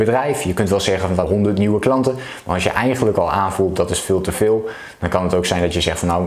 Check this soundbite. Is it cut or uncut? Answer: cut